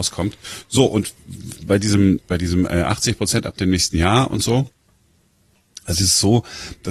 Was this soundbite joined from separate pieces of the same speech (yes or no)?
yes